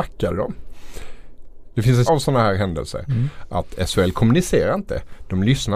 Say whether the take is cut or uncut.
cut